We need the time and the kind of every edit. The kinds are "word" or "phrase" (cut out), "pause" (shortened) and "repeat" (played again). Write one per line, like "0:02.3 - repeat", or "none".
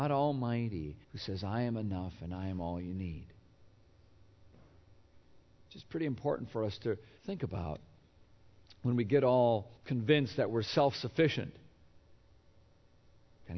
0:01.0 - pause
0:07.2 - pause
0:09.8 - pause